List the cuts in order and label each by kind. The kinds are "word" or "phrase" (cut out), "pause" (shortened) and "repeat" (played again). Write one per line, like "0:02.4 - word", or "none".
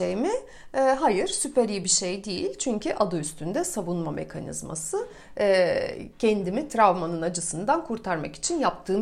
none

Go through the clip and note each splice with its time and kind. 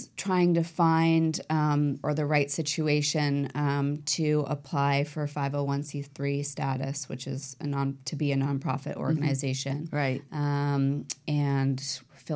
0:02.0 - phrase

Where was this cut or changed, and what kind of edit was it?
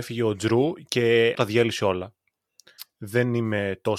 0:01.3 - word

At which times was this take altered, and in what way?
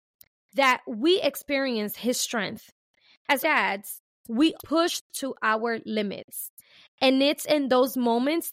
0:03.4 - phrase
0:04.6 - phrase

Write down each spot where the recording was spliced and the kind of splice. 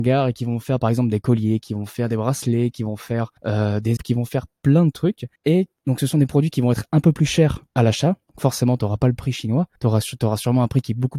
0:03.4 - pause
0:04.0 - word
0:05.4 - pause
0:07.7 - pause
0:09.8 - pause

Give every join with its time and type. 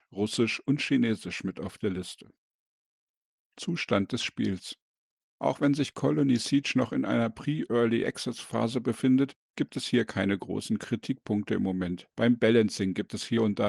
none

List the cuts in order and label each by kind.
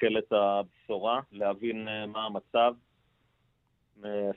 0:01.3 - pause

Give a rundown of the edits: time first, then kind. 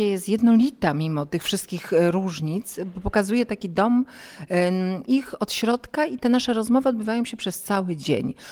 0:05.0 - word

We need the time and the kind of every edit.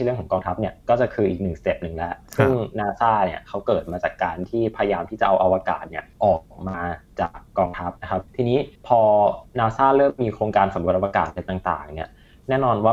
0:06.1 - pause
0:07.5 - pause
0:08.0 - pause
0:08.3 - pause
0:08.8 - pause
0:09.5 - pause

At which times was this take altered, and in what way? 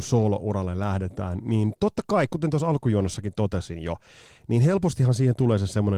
none

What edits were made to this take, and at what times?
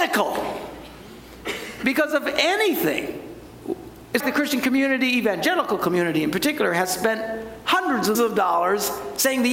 0:04.2 - word
0:08.1 - word

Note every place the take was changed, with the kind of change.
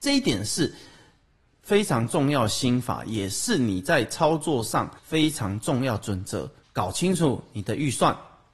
0:05.0 - pause
0:06.6 - pause

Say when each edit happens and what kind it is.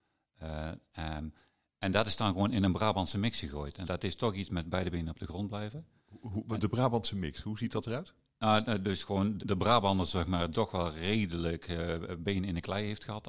0:03.8 - word
0:09.4 - word
0:10.5 - word
0:12.1 - word

